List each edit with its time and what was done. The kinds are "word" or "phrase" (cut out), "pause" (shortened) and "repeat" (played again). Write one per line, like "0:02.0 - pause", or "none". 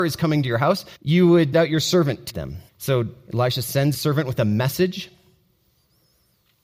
0:01.0 - pause
0:01.5 - word
0:02.3 - word
0:02.7 - pause
0:03.9 - word